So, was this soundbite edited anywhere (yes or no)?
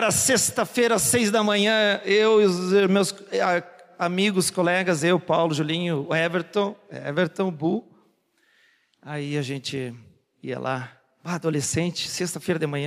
no